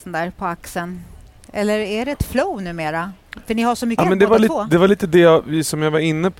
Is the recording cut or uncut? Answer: cut